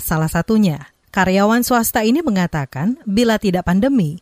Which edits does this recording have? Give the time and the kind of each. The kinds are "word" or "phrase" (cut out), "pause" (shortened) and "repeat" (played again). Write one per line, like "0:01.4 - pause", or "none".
none

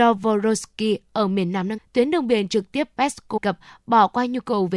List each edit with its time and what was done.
0:01.8 - word
0:03.4 - word

